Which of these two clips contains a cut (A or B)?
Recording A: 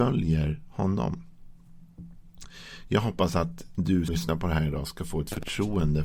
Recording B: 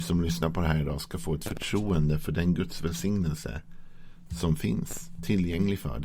A